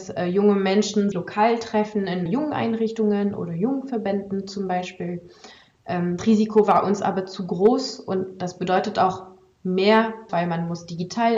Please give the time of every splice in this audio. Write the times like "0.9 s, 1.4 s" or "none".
1.1 s, 2.3 s, 6.2 s, 10.3 s